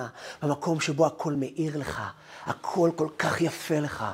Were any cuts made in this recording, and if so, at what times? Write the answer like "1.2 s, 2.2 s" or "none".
none